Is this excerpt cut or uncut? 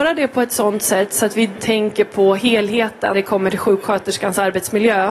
cut